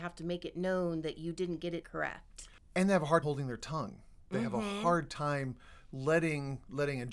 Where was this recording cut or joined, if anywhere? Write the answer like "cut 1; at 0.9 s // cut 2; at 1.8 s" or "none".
cut 1; at 1.8 s // cut 2; at 3.2 s